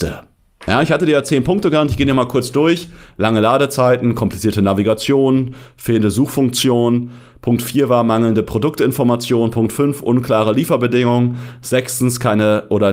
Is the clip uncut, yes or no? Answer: yes